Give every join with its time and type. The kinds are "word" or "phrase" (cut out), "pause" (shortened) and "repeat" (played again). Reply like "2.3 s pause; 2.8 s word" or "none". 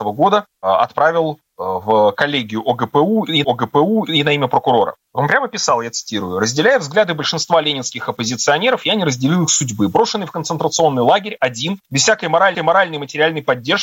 3.4 s repeat; 11.8 s pause; 12.5 s repeat